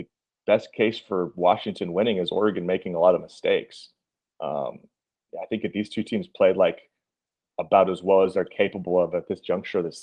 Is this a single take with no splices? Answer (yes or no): yes